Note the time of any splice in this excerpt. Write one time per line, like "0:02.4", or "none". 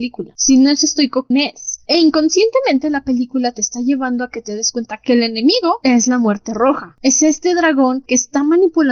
0:01.3